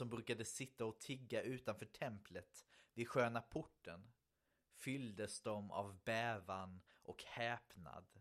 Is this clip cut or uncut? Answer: uncut